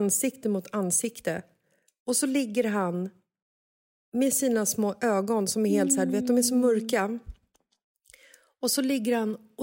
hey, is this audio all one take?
yes; 0 cuts

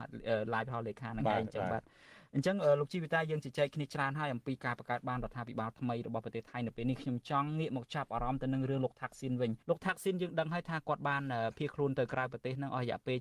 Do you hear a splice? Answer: yes; 1 cut; at 9.6 s

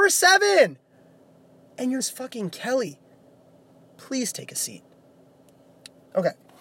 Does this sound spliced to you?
yes; 1 cut; at 2.0 s

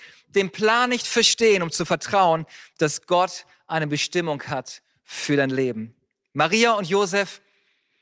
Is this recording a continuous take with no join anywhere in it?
yes; 0 cuts

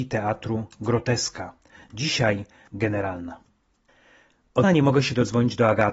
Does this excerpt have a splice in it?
yes; 2 cuts; at 2.7 s, 4.6 s

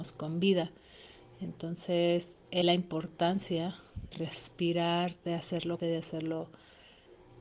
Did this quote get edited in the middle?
yes; 3 cuts; at 2.6 s, 4.1 s, 5.8 s

